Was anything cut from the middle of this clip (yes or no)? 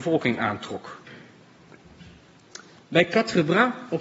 no